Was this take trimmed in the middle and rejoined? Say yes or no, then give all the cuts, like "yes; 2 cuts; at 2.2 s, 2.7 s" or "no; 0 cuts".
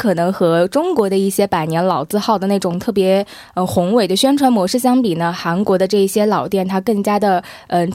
no; 0 cuts